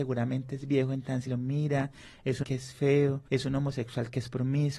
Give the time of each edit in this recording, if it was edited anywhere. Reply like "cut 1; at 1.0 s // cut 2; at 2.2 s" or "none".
cut 1; at 1.3 s // cut 2; at 2.4 s // cut 3; at 3.3 s